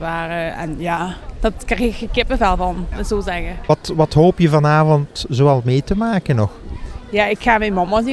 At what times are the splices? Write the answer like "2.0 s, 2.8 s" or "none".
2.9 s